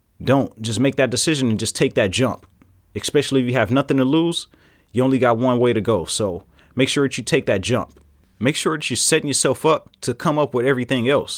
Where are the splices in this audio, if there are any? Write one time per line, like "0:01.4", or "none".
none